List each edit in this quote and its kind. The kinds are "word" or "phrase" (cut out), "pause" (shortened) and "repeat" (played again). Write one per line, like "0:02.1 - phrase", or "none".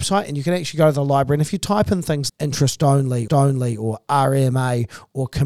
0:02.3 - word
0:03.3 - repeat